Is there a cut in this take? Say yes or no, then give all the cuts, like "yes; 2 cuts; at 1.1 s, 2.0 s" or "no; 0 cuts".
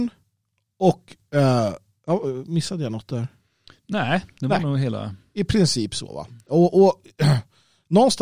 no; 0 cuts